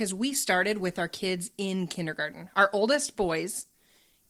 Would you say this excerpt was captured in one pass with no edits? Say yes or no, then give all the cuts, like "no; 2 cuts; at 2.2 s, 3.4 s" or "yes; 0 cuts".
yes; 0 cuts